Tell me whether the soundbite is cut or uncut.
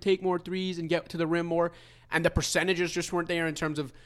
uncut